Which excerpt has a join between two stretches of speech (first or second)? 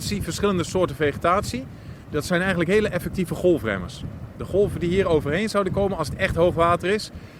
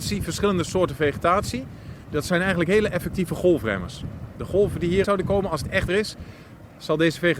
second